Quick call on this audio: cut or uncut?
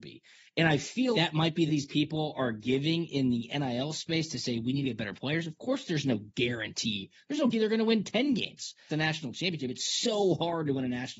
cut